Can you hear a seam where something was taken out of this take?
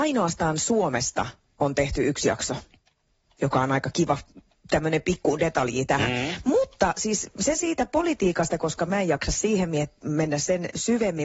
no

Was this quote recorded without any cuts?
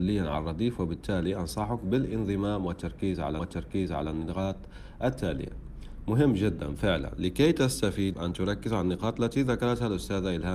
no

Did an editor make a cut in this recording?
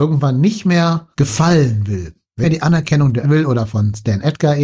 yes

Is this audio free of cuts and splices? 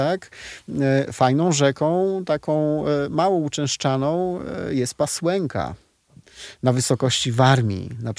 yes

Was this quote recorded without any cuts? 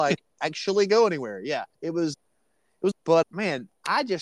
no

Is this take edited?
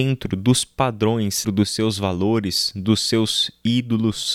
yes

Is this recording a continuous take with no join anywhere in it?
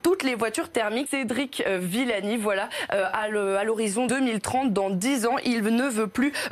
no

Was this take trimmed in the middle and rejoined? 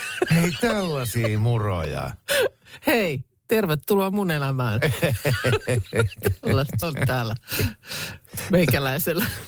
yes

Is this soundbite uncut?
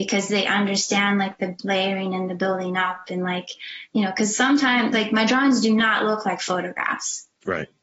yes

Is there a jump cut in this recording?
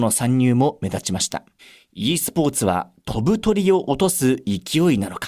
yes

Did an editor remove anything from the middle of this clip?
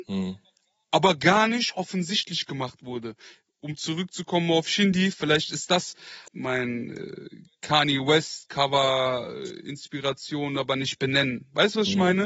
no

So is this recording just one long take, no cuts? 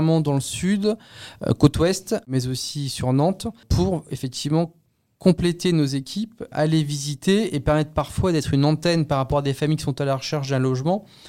yes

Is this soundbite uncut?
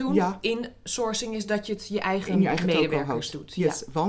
yes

